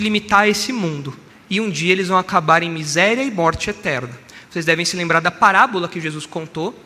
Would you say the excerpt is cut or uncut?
cut